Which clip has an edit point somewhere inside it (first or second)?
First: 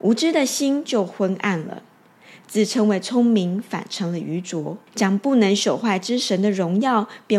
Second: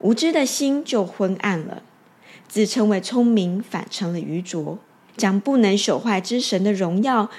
first